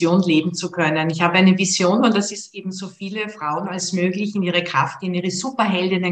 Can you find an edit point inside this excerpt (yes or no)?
no